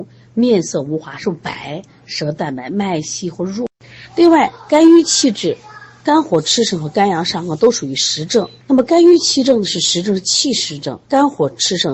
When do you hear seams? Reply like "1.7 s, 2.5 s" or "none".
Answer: 8.6 s, 11.0 s